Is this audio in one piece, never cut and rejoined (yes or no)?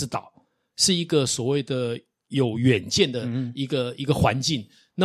yes